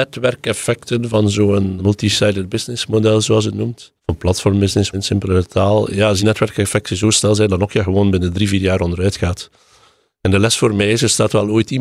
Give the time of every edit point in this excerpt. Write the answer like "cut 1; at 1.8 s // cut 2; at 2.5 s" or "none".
cut 1; at 1.8 s // cut 2; at 4.0 s // cut 3; at 4.9 s // cut 4; at 6.2 s